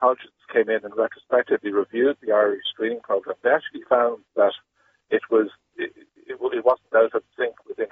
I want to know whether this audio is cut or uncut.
uncut